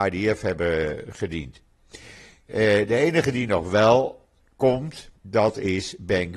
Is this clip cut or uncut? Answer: cut